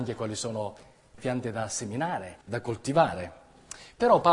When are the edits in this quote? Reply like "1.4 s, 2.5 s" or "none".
1.2 s, 2.4 s